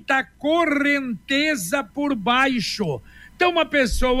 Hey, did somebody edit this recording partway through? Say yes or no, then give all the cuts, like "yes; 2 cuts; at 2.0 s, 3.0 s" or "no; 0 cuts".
no; 0 cuts